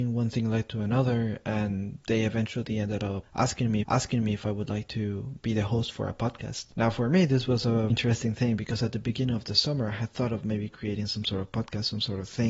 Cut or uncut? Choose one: cut